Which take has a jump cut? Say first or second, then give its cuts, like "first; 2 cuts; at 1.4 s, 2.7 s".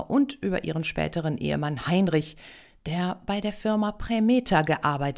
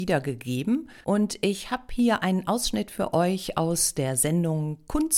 second; 1 cut; at 1.0 s